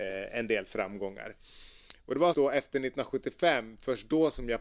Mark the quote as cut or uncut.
cut